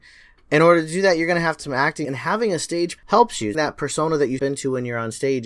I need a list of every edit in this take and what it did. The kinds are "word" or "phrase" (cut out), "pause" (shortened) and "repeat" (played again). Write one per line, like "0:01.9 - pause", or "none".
0:01.6 - word
0:02.0 - word
0:03.0 - word
0:03.5 - word
0:04.4 - word